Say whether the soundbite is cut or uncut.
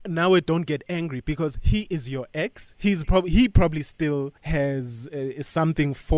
cut